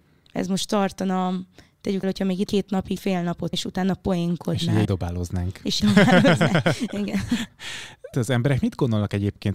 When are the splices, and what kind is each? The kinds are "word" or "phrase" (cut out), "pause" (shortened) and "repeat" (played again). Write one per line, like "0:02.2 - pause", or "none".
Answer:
0:02.0 - word
0:02.5 - word
0:03.0 - word
0:03.5 - word
0:04.9 - word
0:05.8 - word
0:08.1 - word